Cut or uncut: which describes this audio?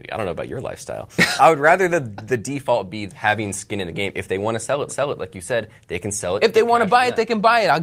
cut